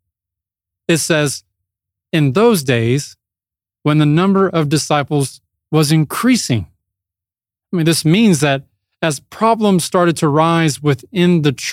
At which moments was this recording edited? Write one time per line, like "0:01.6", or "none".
none